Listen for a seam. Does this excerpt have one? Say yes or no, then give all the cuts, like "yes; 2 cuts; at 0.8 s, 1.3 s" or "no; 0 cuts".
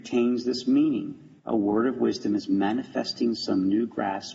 yes; 1 cut; at 1.4 s